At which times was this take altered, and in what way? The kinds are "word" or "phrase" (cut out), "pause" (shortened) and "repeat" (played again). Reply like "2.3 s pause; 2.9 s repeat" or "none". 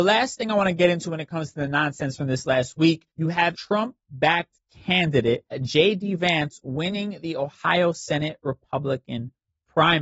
3.1 s pause; 3.5 s word; 4.0 s pause; 5.5 s word